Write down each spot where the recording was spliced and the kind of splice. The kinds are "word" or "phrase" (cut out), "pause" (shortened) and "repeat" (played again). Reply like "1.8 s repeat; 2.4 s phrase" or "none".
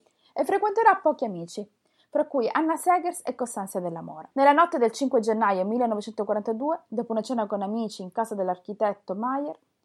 4.3 s pause